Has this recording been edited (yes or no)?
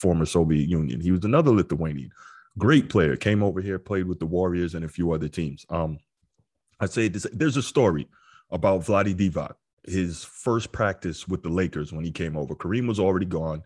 no